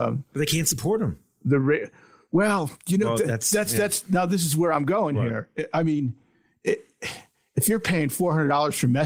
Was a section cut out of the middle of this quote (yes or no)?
no